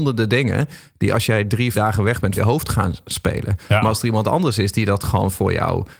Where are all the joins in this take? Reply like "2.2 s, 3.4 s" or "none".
1.7 s, 2.4 s